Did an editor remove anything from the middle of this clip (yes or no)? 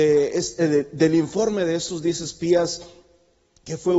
no